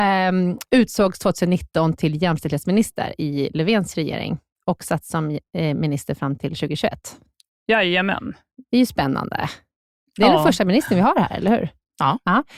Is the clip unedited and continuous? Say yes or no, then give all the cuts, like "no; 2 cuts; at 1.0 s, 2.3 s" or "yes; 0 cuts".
yes; 0 cuts